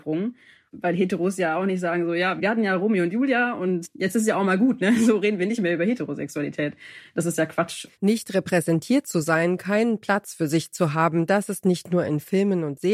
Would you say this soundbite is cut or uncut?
cut